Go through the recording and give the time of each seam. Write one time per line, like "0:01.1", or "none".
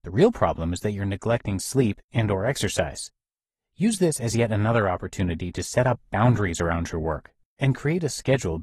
none